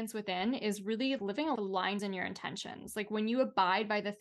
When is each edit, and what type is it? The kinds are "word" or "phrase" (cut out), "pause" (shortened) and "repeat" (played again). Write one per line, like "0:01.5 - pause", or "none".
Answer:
0:01.2 - word
0:01.5 - word
0:02.0 - phrase

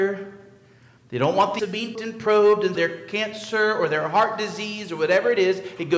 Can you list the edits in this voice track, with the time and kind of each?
0:01.6 - phrase
0:02.0 - word
0:02.8 - word

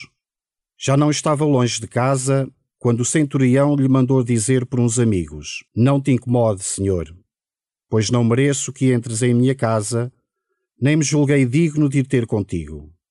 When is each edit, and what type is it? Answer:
0:05.7 - pause

